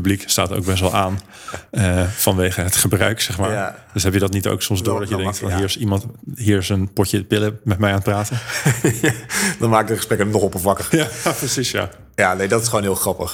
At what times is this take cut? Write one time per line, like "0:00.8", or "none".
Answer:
none